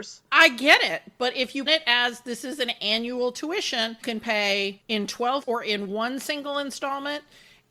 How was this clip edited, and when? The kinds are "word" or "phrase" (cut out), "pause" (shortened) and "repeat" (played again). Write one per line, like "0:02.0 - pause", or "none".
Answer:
0:01.7 - word
0:04.0 - phrase
0:05.4 - phrase